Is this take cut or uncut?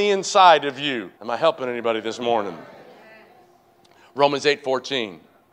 cut